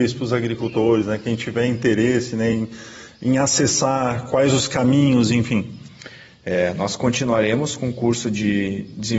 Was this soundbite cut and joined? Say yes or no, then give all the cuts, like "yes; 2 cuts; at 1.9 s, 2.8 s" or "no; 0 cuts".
no; 0 cuts